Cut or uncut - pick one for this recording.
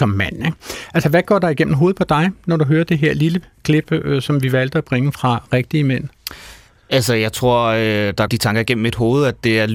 cut